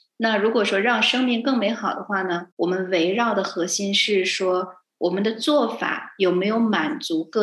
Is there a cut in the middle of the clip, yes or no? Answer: yes